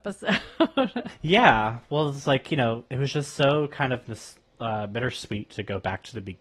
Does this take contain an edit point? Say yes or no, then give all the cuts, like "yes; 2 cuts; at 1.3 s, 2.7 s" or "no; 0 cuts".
yes; 1 cut; at 2.9 s